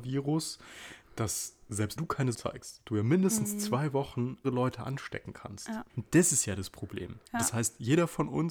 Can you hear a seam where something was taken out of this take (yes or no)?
yes